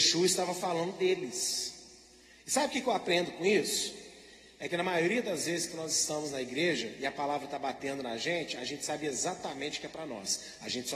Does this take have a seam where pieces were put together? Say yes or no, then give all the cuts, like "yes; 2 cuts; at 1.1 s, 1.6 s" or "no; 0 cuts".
no; 0 cuts